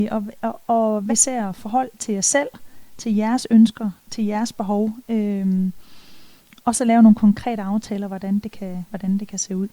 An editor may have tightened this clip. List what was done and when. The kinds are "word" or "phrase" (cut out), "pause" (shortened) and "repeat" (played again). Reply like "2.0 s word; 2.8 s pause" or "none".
1.1 s word